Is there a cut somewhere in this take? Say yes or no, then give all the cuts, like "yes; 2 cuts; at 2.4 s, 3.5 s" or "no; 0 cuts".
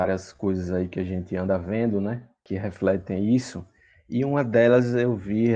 no; 0 cuts